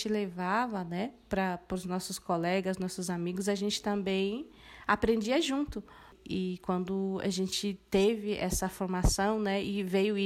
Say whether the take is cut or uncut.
uncut